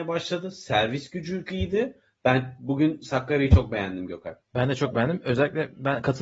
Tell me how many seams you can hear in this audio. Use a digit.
2